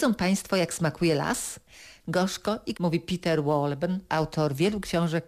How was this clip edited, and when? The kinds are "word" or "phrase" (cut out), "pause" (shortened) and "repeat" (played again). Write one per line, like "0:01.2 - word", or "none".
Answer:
0:02.7 - word
0:04.1 - word